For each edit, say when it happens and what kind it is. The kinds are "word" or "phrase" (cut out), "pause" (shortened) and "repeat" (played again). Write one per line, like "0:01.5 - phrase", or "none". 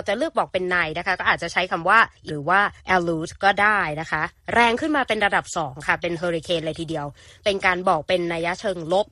0:02.3 - word
0:02.8 - pause

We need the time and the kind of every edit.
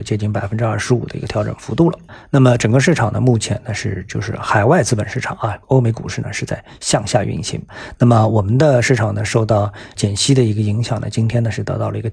0:05.6 - pause

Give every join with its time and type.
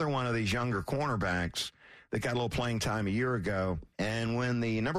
0:03.9 - pause

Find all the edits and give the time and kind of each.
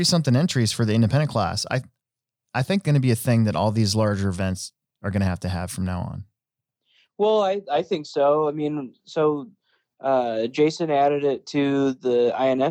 0:02.8 - word

